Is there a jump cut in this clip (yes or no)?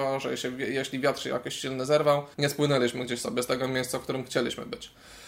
yes